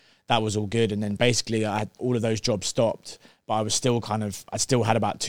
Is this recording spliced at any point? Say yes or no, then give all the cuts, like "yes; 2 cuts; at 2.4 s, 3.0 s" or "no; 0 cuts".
yes; 1 cut; at 2.0 s